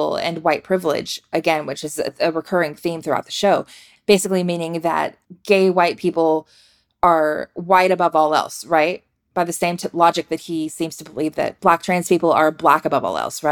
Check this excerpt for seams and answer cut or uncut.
uncut